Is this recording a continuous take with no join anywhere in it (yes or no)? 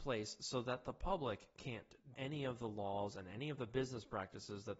no